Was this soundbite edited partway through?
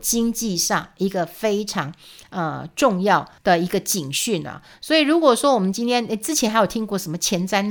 yes; 1 cut; at 3.4 s

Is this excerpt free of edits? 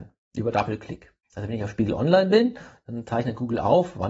no; 1 cut; at 1.2 s

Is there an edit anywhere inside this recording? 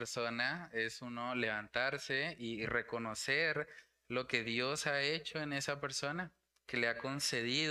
no; 0 cuts

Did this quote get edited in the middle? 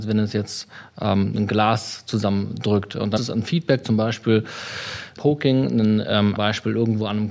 yes; 3 cuts; at 3.2 s, 5.2 s, 6.4 s

